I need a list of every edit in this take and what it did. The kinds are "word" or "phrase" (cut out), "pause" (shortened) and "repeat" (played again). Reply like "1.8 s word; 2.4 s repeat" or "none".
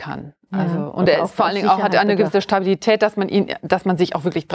none